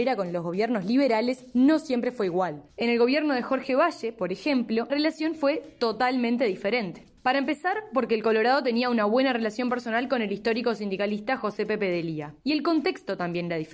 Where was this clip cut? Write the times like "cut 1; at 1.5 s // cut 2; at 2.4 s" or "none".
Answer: cut 1; at 4.9 s // cut 2; at 7.2 s